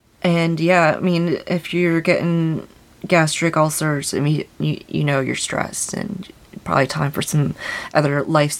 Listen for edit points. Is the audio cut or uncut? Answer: uncut